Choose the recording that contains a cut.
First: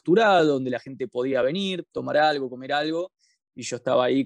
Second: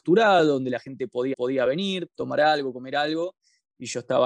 second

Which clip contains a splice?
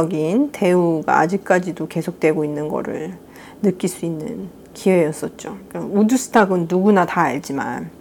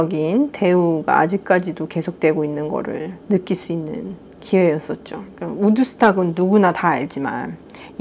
second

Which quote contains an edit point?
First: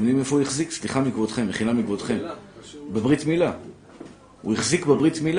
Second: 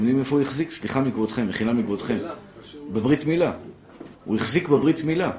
second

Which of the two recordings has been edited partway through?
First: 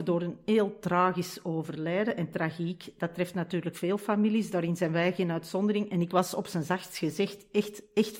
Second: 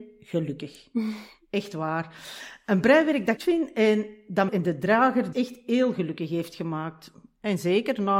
second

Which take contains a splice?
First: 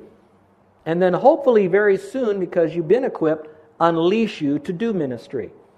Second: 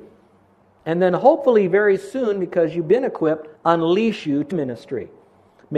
second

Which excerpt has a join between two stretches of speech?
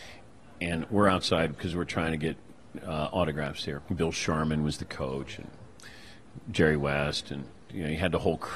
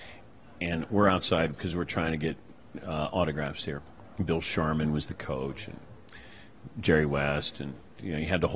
first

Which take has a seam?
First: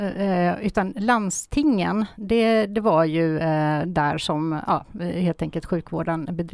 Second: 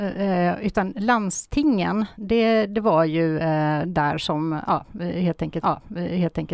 second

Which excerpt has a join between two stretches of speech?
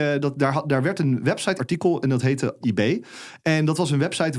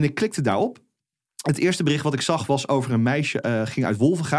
first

